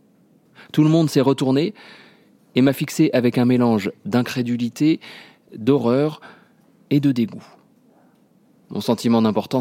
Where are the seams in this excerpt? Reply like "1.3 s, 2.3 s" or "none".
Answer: none